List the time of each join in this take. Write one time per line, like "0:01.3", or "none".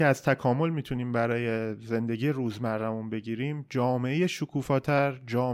none